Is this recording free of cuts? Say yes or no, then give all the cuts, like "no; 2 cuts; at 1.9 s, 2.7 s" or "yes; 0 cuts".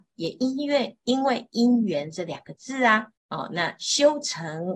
no; 1 cut; at 3.2 s